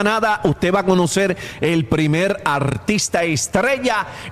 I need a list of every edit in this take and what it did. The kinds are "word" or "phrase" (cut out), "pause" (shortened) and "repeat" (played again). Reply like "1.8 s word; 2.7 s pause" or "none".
none